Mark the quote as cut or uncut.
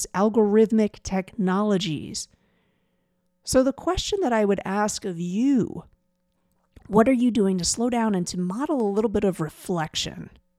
uncut